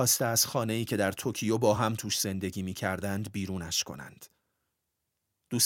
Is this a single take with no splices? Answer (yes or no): yes